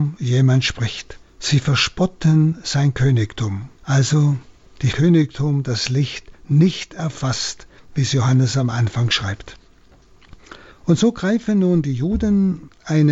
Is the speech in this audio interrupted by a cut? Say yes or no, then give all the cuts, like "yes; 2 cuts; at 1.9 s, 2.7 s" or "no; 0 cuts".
yes; 3 cuts; at 1.2 s, 3.8 s, 4.9 s